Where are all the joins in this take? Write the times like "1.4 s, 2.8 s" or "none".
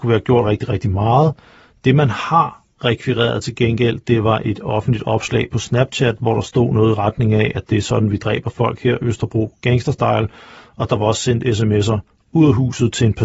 none